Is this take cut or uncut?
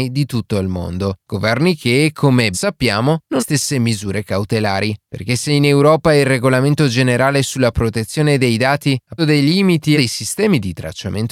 cut